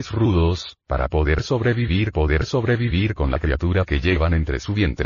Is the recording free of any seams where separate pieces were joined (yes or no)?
no